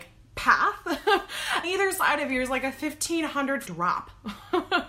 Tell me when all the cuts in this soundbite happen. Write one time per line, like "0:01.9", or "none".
0:01.6
0:03.6